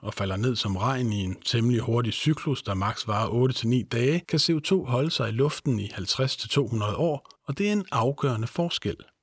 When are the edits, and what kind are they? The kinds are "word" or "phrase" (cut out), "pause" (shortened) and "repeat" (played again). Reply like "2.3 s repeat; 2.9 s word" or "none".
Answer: 4.2 s pause; 7.3 s pause